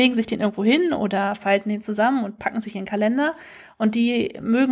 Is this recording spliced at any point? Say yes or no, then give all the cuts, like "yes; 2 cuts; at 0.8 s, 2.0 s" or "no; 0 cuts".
no; 0 cuts